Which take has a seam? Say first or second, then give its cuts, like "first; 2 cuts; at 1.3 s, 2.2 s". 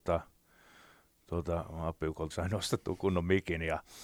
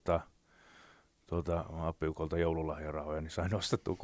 first; 1 cut; at 2.3 s